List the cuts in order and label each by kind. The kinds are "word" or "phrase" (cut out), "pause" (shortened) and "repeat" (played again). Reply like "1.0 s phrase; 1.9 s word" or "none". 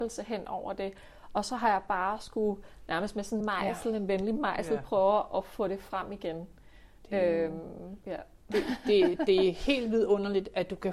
3.4 s word; 8.0 s pause